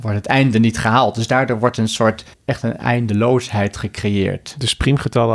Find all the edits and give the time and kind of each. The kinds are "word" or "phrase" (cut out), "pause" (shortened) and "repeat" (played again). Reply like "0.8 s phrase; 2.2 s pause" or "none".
2.3 s pause